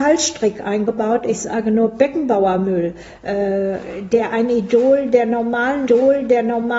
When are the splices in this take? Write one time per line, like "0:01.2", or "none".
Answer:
0:05.9